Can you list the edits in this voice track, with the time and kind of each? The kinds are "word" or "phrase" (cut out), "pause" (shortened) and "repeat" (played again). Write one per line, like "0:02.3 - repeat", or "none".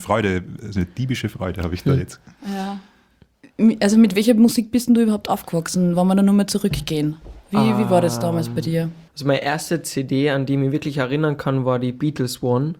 0:09.1 - pause